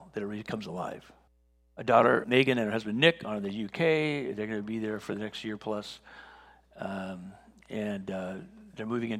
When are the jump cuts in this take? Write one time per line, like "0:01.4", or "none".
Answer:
0:01.3
0:02.2